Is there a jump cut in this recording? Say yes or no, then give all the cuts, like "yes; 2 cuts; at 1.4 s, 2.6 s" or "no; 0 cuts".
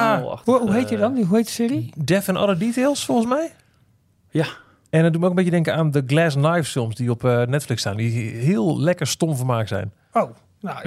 no; 0 cuts